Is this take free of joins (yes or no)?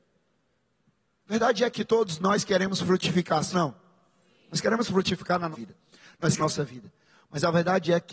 no